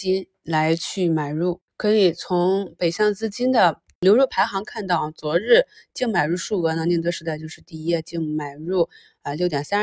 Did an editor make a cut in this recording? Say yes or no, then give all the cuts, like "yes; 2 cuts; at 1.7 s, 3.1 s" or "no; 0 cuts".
no; 0 cuts